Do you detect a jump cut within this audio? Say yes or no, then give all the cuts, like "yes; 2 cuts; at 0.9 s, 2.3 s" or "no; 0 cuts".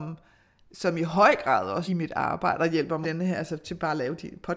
yes; 2 cuts; at 1.9 s, 3.0 s